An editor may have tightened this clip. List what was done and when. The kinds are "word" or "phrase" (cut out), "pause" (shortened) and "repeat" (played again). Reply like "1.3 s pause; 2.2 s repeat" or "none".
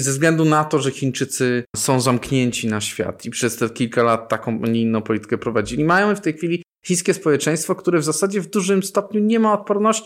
1.7 s pause